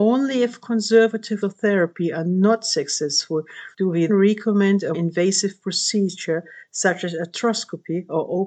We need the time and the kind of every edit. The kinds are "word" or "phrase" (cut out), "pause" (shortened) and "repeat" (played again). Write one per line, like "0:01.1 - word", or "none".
0:01.4 - word
0:03.7 - pause
0:04.1 - word
0:04.9 - word